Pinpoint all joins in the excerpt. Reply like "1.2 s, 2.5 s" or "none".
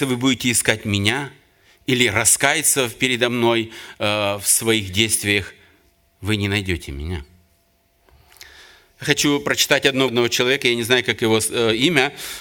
10.1 s